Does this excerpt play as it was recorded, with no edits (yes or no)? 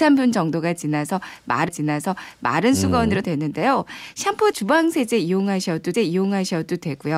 no